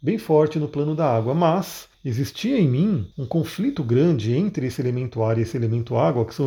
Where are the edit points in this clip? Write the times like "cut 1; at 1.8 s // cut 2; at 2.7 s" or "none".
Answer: cut 1; at 1.9 s // cut 2; at 3.1 s // cut 3; at 3.8 s